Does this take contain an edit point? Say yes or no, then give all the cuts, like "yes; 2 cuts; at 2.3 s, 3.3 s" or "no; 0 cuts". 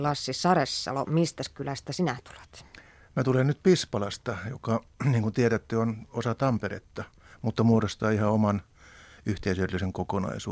no; 0 cuts